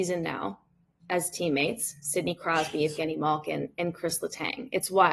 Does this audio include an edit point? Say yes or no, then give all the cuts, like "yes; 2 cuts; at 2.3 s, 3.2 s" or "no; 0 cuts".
no; 0 cuts